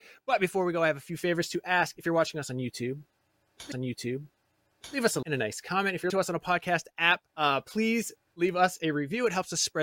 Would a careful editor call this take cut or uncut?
cut